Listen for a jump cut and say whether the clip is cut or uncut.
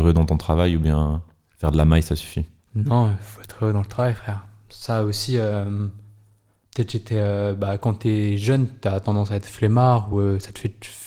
uncut